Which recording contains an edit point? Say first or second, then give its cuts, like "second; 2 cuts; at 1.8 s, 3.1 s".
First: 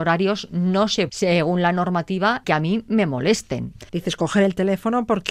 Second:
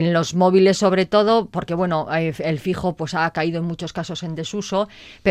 first; 3 cuts; at 1.1 s, 2.4 s, 3.9 s